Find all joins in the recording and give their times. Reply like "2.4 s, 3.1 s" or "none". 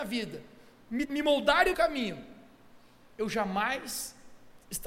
1.0 s, 1.7 s